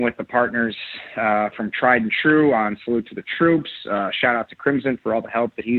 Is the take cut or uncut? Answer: uncut